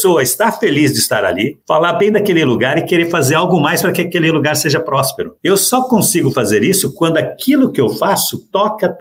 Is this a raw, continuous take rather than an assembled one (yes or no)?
no